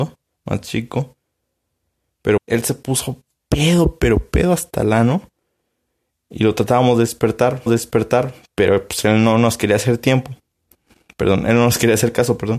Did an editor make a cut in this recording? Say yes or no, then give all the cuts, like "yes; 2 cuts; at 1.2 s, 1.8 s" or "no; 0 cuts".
yes; 2 cuts; at 2.4 s, 7.7 s